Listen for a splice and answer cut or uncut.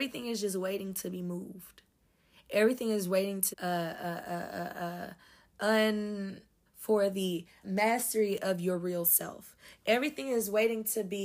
cut